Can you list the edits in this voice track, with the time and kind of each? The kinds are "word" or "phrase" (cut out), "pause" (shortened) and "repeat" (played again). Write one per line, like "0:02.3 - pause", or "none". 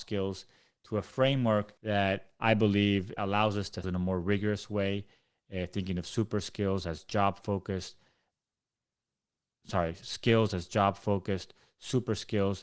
0:01.8 - pause
0:03.2 - word
0:03.8 - phrase
0:10.0 - phrase